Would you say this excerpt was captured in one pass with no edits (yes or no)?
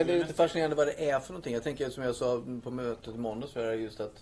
yes